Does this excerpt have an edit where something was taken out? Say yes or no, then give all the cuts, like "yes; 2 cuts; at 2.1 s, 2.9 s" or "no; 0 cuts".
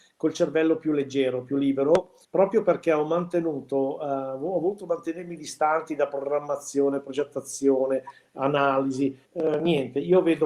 yes; 2 cuts; at 2.2 s, 9.2 s